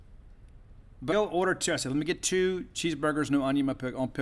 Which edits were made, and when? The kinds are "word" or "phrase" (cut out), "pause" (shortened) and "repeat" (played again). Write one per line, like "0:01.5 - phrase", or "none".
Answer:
0:01.1 - word